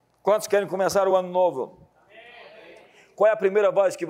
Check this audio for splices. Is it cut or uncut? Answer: uncut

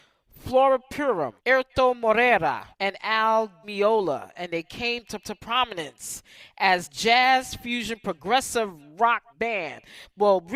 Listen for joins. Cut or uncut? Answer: cut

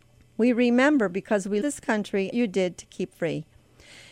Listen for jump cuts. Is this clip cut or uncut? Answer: cut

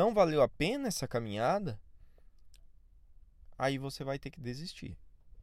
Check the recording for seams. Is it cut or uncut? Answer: uncut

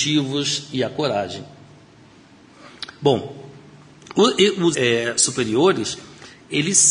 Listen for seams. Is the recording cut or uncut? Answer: cut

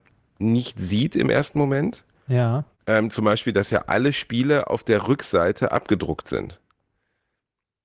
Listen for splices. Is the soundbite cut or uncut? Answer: cut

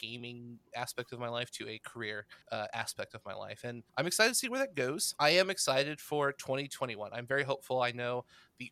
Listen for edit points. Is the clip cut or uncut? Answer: cut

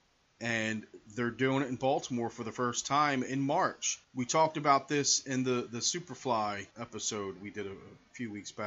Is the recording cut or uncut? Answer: cut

